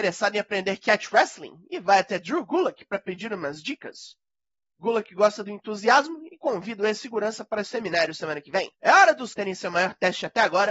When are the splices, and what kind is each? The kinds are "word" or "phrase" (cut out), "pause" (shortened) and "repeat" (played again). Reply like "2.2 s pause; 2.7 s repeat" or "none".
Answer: 4.5 s pause; 7.6 s word; 8.7 s pause; 9.3 s word

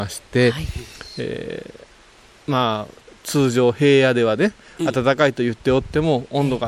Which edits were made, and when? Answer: none

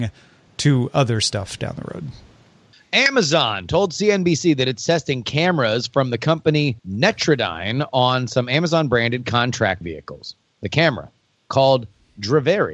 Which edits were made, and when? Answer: 2.7 s pause; 6.8 s pause; 9.8 s word

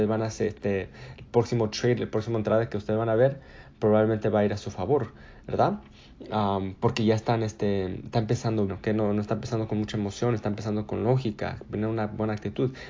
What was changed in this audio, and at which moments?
8.7 s word

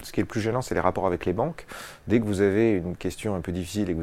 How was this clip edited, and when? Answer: none

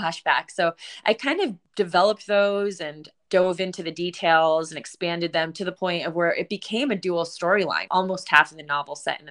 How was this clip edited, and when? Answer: 7.9 s word

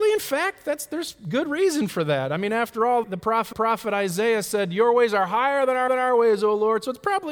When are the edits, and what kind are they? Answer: 3.0 s word; 3.5 s repeat; 5.9 s repeat

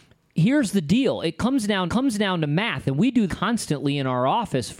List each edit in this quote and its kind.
1.9 s repeat; 3.3 s word

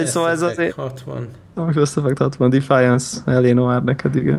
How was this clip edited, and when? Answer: 1.4 s pause

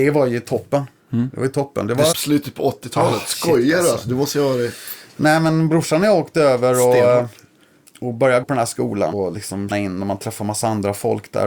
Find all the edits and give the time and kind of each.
2.1 s word; 8.4 s word; 9.1 s word; 9.7 s word

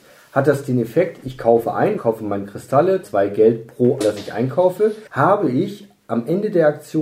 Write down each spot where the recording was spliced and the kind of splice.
2.0 s phrase; 3.0 s word; 4.0 s phrase; 5.1 s pause

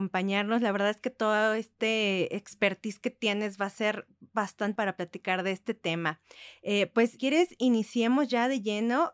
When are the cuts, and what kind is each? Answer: 4.8 s word; 7.2 s word

